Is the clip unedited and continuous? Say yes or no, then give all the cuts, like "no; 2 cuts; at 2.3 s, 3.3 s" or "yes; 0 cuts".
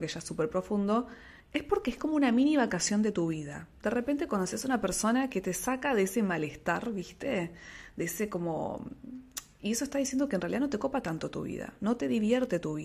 no; 1 cut; at 1.4 s